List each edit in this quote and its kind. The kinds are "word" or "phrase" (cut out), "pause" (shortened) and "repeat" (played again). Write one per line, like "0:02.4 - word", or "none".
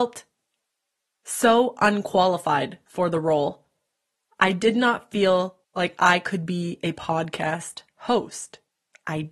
0:05.6 - pause